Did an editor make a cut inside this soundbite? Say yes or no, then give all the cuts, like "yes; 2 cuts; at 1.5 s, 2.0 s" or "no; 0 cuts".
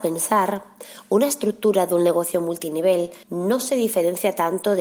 yes; 1 cut; at 3.2 s